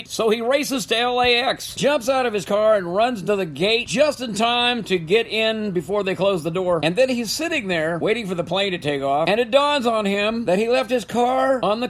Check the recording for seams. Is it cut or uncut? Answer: uncut